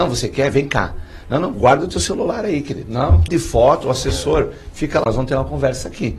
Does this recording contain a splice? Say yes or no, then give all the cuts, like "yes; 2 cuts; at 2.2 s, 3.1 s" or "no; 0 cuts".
yes; 3 cuts; at 1.5 s, 3.3 s, 5.1 s